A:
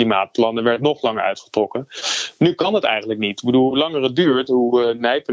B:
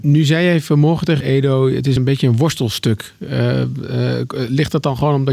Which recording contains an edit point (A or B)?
B